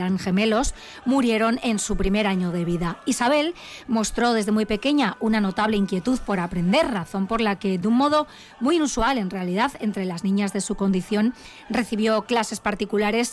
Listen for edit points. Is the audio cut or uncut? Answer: uncut